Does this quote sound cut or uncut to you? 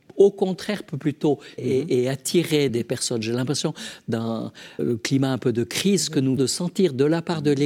cut